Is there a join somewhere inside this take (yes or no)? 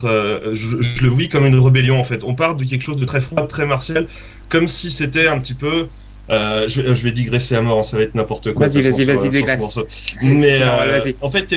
yes